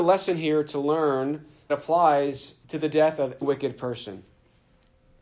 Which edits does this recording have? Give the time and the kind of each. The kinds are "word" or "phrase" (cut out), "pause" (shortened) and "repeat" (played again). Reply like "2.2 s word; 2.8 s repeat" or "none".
1.7 s word; 2.6 s pause; 3.4 s word